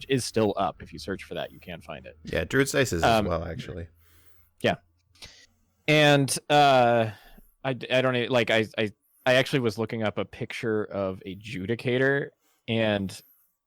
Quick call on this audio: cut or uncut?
uncut